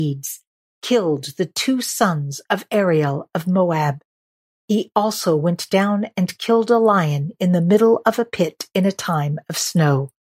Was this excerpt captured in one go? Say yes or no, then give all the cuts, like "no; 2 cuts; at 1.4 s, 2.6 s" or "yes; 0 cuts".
yes; 0 cuts